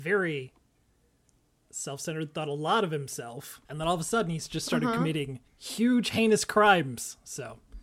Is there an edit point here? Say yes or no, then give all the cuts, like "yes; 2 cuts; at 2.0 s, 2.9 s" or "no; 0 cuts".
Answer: yes; 2 cuts; at 3.6 s, 5.5 s